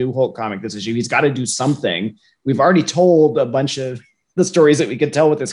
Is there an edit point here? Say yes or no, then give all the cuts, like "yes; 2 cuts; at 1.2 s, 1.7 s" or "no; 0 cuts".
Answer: no; 0 cuts